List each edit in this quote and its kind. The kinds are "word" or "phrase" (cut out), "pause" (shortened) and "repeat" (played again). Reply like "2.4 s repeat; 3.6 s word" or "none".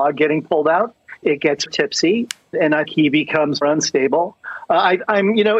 1.2 s word; 1.7 s word; 2.5 s word; 2.9 s word; 3.6 s word

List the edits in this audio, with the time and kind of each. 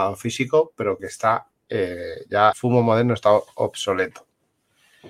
1.0 s word; 2.5 s word

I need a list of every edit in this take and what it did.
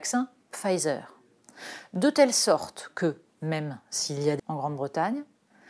4.4 s word

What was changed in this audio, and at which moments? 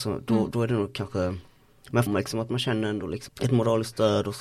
2.1 s word; 3.3 s word

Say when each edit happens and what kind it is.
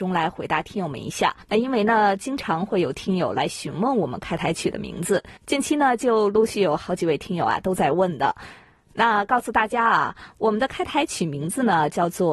1.4 s pause; 5.4 s pause

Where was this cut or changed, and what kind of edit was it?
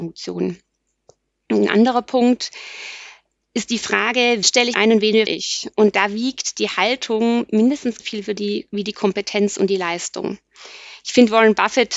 4.4 s word; 4.7 s word; 5.3 s word; 8.0 s word

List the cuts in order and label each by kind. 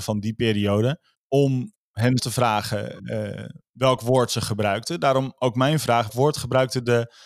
1.2 s pause; 2.2 s word; 6.1 s word

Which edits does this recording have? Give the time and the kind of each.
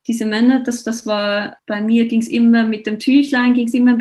1.6 s word

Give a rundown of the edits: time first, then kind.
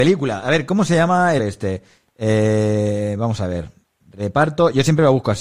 1.4 s word

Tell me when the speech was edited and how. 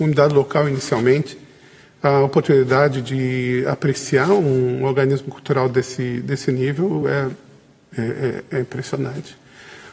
none

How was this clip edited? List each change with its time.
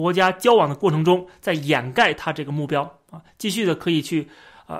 none

